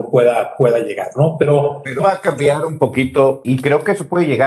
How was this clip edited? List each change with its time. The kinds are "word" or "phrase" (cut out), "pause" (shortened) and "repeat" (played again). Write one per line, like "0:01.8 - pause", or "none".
0:02.0 - word
0:03.4 - word